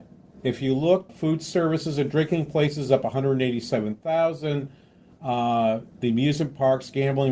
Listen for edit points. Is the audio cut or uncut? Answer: cut